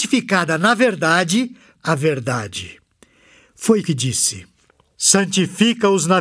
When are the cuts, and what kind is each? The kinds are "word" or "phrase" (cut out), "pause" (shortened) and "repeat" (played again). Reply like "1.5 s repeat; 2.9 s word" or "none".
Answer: 1.8 s word; 3.8 s word